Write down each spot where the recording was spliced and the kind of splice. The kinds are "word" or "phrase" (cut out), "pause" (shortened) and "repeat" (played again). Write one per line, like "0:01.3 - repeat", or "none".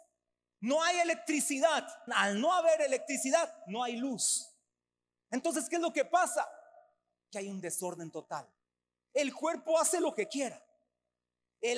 0:02.1 - phrase